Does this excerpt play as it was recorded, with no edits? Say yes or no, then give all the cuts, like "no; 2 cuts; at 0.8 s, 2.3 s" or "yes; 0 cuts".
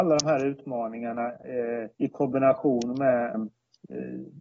no; 2 cuts; at 1.9 s, 3.3 s